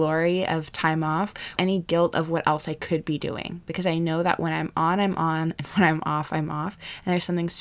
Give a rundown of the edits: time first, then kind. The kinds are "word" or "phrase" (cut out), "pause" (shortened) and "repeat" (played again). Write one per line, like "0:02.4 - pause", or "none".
0:01.6 - word